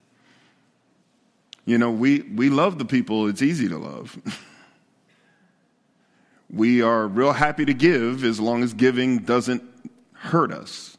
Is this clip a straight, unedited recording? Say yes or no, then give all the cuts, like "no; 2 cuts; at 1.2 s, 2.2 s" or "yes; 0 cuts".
yes; 0 cuts